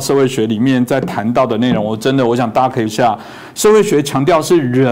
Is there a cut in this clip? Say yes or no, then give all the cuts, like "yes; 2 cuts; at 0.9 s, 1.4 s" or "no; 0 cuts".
yes; 1 cut; at 2.9 s